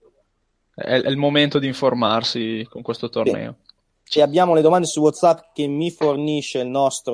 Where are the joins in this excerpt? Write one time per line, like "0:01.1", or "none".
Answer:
0:04.2

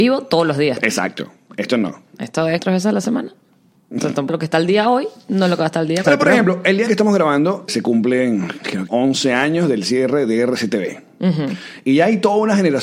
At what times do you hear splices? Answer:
0:02.6
0:04.3
0:06.0
0:06.9
0:07.7
0:08.9

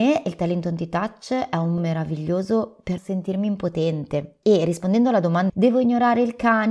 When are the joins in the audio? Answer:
0:01.8
0:03.0
0:05.5

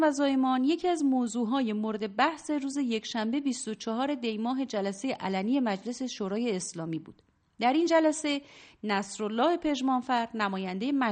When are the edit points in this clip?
none

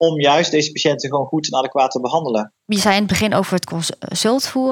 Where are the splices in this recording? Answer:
0:02.6

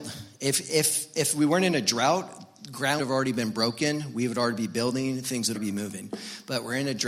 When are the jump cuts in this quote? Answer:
0:03.0
0:05.5

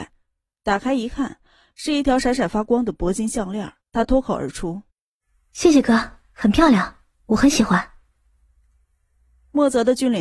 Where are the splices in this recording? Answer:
0:03.8
0:04.9

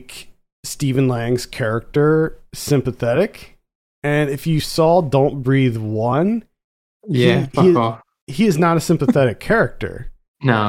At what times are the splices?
none

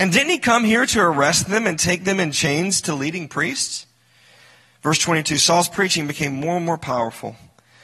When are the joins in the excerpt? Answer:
none

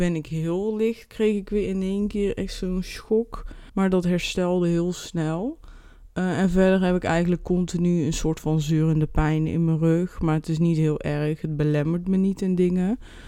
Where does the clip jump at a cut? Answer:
0:03.7

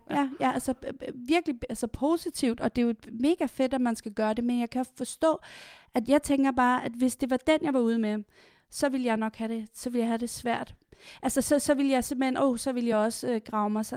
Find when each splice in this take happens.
none

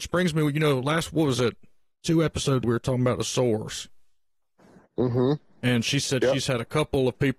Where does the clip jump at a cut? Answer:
0:02.6

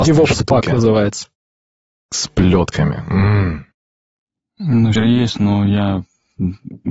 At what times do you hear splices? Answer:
0:05.0

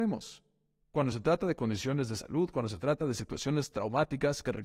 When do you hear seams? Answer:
none

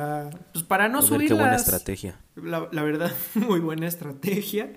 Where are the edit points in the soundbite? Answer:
0:02.3

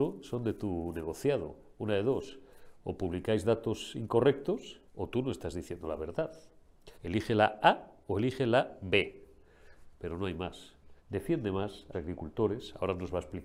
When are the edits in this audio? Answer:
0:04.9
0:06.9
0:09.9
0:11.0
0:11.9

